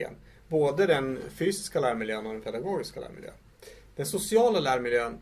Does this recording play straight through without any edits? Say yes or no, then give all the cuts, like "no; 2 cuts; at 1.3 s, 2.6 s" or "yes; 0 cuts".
yes; 0 cuts